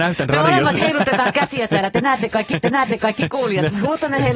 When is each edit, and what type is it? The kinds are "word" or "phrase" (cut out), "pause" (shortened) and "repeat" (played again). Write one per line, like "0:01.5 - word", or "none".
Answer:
0:02.6 - repeat